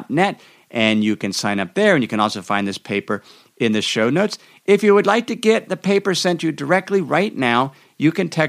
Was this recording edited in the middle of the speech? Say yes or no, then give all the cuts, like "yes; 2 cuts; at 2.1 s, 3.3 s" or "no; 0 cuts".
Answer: no; 0 cuts